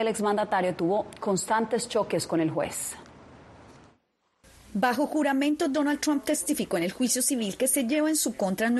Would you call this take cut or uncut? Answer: uncut